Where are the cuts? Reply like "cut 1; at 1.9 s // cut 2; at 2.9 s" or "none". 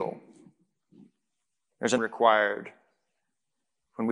cut 1; at 2.0 s